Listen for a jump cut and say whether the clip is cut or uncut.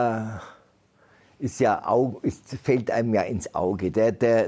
uncut